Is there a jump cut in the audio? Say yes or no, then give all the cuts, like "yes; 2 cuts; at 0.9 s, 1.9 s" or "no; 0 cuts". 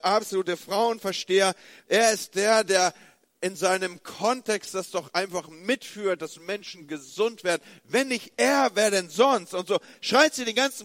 no; 0 cuts